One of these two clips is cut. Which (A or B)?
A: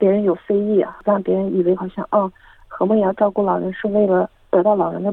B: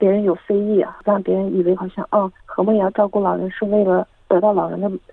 B